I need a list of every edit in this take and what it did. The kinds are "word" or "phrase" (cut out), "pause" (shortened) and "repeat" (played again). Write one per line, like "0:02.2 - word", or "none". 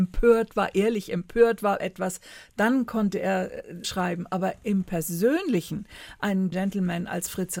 0:01.8 - word
0:03.8 - word
0:06.5 - word